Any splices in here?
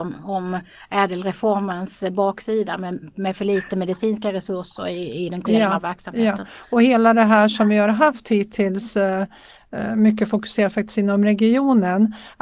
yes; 1 cut; at 5.4 s

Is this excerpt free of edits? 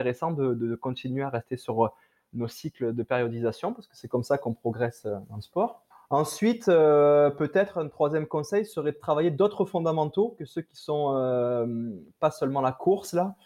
no; 1 cut; at 5.9 s

